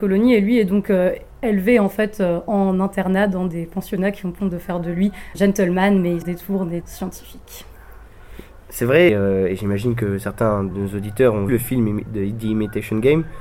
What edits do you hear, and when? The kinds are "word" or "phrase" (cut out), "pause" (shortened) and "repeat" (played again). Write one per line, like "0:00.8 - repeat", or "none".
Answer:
0:04.4 - word
0:05.3 - word
0:06.2 - word
0:06.8 - word
0:09.1 - word
0:10.7 - word
0:11.5 - word